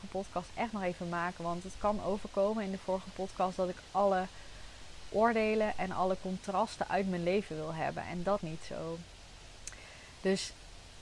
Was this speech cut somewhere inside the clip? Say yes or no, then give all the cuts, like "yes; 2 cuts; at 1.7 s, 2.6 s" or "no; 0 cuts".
yes; 1 cut; at 8.4 s